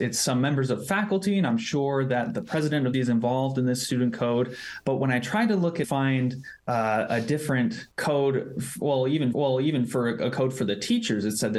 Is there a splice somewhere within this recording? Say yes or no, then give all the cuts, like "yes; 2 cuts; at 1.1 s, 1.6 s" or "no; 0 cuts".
yes; 5 cuts; at 2.9 s, 5.8 s, 6.6 s, 7.9 s, 9.3 s